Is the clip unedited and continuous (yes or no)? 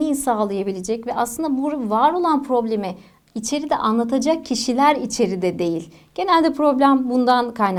yes